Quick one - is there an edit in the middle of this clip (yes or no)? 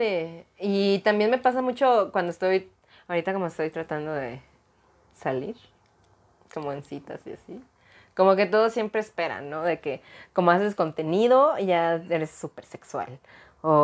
no